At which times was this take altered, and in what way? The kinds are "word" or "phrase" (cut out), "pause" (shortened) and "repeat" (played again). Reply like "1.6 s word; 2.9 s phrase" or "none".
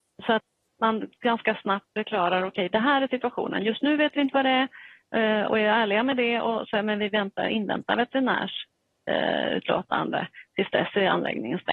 none